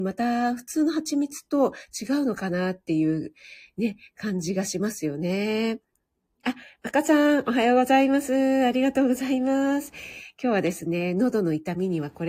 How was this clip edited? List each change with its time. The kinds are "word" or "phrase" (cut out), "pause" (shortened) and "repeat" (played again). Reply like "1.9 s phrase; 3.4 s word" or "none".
none